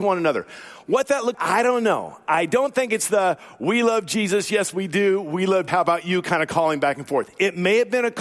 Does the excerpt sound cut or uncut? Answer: cut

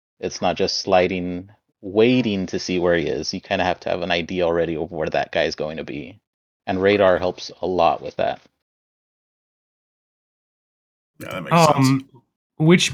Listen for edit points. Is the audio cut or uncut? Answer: uncut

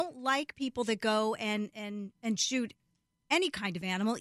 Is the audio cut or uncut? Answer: uncut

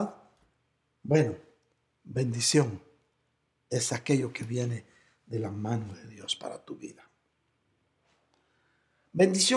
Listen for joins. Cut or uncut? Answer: uncut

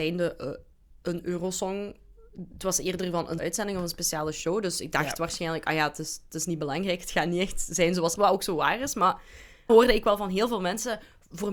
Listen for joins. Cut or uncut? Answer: cut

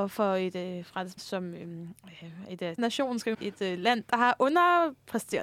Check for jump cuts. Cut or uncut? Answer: cut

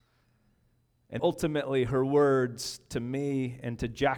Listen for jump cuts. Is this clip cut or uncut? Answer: cut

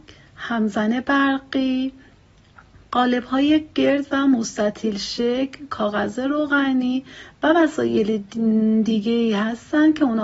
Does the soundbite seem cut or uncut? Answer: uncut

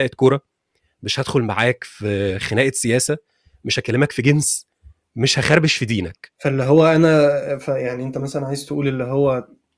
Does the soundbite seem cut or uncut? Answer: uncut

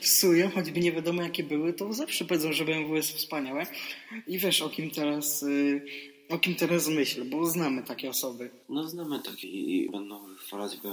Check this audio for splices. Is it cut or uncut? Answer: cut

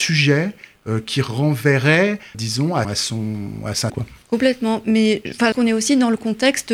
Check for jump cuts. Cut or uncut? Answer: cut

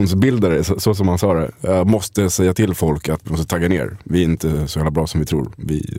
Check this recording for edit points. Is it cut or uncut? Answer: cut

